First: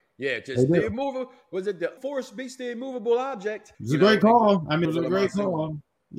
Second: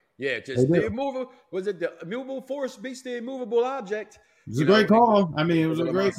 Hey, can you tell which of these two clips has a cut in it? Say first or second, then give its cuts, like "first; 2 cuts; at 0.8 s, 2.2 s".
first; 3 cuts; at 2.0 s, 3.7 s, 4.9 s